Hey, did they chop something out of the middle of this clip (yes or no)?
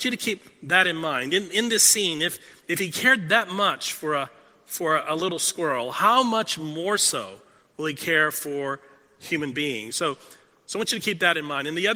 no